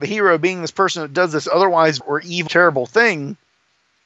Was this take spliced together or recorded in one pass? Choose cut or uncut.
cut